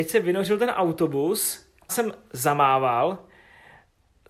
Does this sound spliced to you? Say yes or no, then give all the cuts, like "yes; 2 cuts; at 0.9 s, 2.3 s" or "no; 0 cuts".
yes; 1 cut; at 1.9 s